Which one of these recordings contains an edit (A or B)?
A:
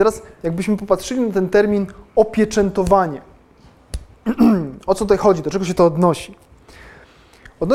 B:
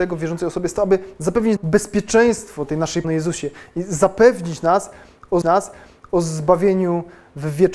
B